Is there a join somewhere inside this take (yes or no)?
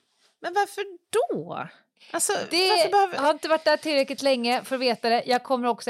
yes